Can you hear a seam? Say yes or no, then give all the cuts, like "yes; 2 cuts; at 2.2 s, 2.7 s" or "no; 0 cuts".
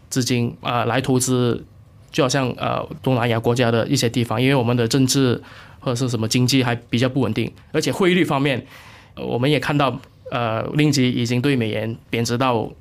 no; 0 cuts